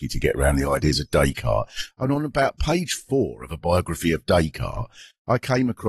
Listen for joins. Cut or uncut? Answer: uncut